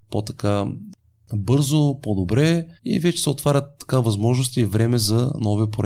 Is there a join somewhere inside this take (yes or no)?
yes